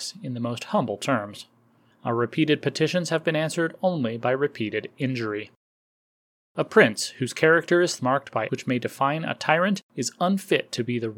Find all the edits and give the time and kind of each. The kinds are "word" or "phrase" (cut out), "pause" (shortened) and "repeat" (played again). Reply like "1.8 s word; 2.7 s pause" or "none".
8.0 s word; 8.5 s phrase